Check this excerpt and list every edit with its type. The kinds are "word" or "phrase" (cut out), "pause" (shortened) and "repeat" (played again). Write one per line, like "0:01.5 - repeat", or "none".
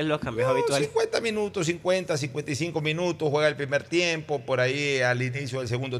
none

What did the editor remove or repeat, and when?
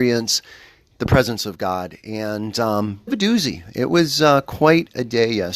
0:03.1 - phrase

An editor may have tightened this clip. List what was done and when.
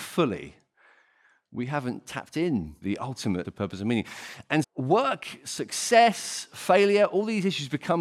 0:02.8 - word
0:03.4 - word
0:04.6 - word

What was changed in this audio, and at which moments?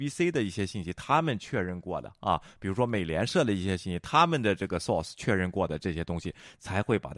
none

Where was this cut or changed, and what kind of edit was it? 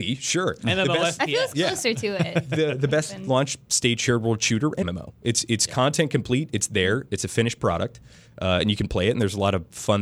0:04.8 - word

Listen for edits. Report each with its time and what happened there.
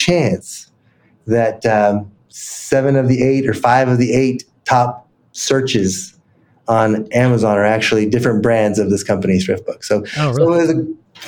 none

